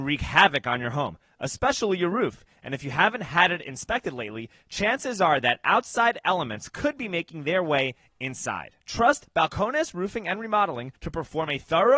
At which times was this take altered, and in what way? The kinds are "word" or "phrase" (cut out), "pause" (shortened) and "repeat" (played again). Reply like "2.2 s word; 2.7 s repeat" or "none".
8.8 s pause; 11.0 s pause